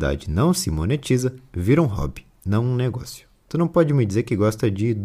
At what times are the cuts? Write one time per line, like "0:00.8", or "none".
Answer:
none